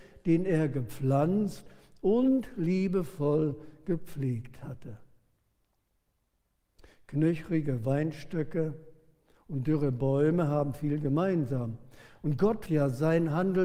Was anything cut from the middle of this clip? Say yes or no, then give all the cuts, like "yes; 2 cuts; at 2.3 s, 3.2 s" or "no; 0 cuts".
yes; 1 cut; at 12.7 s